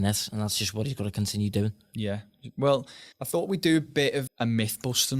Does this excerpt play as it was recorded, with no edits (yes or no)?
no